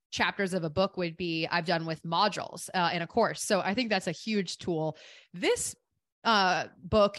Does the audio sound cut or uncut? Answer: uncut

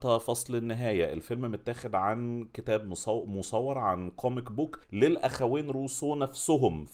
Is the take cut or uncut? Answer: cut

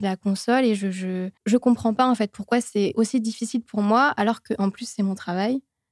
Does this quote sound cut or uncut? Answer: cut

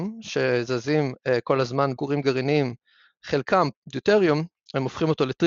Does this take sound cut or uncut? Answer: cut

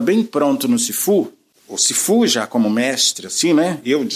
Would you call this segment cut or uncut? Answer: uncut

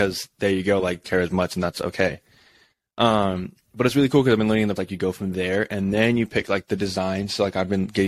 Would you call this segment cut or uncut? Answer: cut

